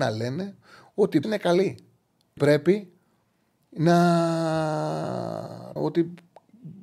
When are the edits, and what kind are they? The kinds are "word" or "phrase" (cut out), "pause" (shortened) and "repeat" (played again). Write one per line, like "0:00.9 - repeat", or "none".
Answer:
0:01.2 - word
0:02.4 - word
0:05.8 - word